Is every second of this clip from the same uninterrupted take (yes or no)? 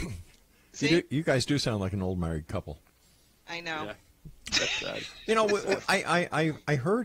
yes